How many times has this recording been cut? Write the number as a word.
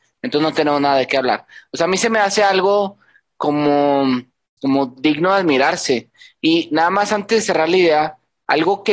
one